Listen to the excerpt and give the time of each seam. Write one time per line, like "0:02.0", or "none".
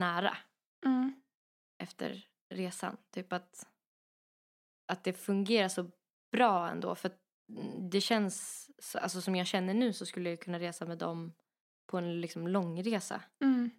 none